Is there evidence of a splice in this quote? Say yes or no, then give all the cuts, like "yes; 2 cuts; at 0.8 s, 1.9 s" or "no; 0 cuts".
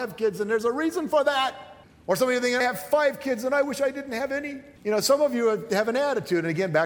yes; 3 cuts; at 1.8 s, 2.6 s, 4.8 s